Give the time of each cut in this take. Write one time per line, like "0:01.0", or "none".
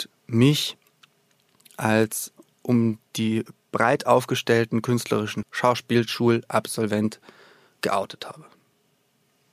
0:03.1
0:05.4

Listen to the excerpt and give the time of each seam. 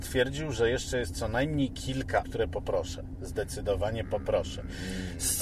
0:02.2

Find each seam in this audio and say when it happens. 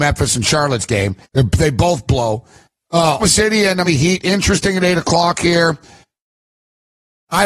0:01.2
0:03.2
0:03.8

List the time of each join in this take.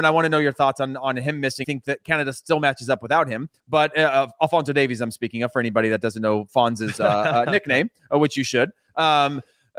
0:01.6
0:03.6

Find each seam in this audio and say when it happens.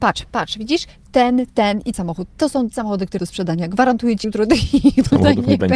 0:01.0
0:01.9
0:02.7
0:03.2
0:04.2

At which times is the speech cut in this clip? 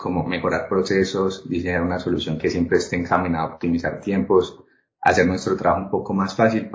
none

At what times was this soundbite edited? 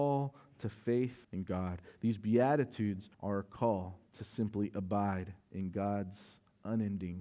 0:01.2
0:03.1
0:04.1
0:05.4

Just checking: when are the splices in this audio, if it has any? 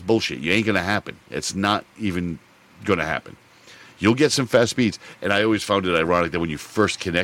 none

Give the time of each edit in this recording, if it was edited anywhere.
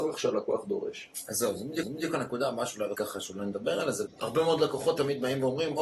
0:01.8
0:02.9
0:04.1

